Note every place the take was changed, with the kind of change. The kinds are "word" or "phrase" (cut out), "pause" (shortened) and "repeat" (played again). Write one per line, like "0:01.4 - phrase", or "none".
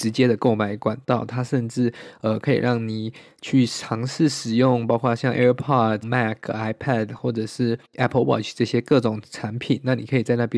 0:06.0 - word
0:07.8 - pause